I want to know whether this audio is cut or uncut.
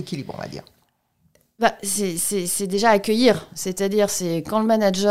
uncut